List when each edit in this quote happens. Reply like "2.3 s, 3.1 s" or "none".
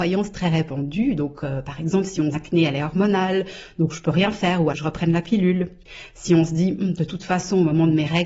2.3 s, 4.7 s